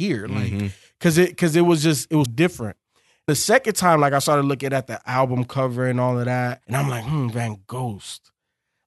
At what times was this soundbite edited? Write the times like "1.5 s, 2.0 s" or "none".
2.3 s, 3.3 s, 6.6 s